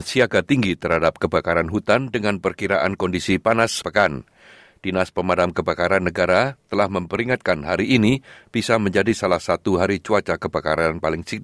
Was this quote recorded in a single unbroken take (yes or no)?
no